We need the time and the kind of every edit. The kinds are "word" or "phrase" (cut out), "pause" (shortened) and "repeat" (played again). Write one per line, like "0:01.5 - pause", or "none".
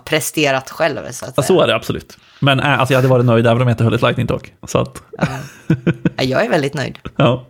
0:04.6 - pause